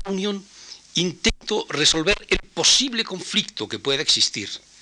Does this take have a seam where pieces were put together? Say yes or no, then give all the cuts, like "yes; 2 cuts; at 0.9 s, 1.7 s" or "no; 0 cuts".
no; 0 cuts